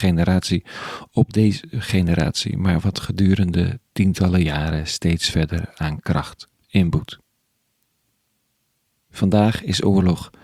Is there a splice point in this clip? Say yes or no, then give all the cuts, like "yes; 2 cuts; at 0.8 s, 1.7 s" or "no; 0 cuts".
no; 0 cuts